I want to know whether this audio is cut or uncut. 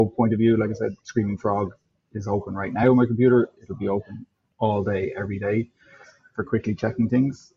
uncut